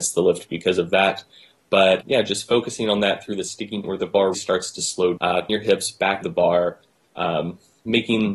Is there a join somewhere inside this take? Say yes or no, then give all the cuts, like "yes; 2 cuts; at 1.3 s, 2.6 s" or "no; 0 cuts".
yes; 6 cuts; at 2.0 s, 3.8 s, 4.3 s, 5.2 s, 5.5 s, 6.2 s